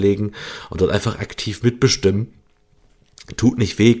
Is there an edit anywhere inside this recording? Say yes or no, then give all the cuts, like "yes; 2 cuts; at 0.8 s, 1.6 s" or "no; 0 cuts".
no; 0 cuts